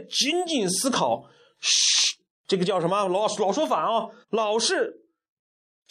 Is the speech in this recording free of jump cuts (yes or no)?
no